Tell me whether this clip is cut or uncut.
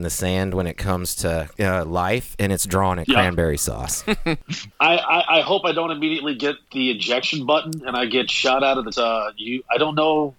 cut